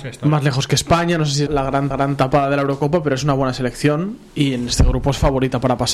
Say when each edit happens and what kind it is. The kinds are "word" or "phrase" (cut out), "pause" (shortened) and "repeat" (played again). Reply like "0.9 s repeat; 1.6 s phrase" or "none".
1.5 s word; 1.9 s repeat